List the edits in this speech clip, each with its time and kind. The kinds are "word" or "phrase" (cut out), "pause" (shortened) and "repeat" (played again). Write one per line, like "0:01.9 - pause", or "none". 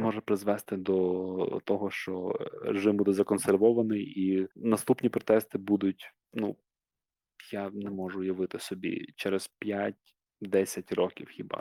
0:04.5 - pause
0:06.2 - pause